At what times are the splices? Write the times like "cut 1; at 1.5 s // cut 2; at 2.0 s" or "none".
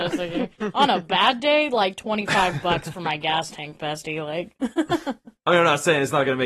cut 1; at 4.6 s // cut 2; at 5.4 s